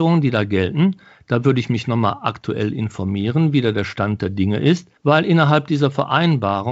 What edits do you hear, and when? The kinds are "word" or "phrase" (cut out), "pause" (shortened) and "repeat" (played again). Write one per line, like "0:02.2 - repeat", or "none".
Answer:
0:05.0 - pause